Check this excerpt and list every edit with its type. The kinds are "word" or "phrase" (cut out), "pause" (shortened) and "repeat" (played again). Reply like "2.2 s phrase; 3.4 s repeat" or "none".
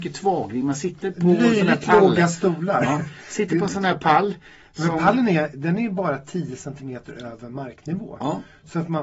1.1 s word